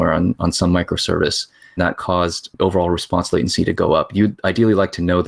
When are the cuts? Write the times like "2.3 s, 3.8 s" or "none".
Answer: 1.8 s, 2.6 s